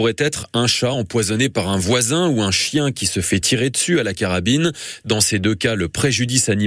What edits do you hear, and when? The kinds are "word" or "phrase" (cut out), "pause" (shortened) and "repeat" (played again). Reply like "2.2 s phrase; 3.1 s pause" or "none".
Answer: none